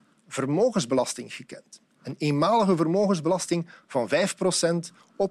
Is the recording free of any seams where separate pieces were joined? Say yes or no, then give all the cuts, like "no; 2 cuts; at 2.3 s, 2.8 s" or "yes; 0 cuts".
yes; 0 cuts